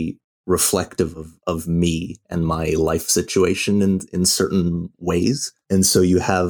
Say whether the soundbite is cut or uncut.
uncut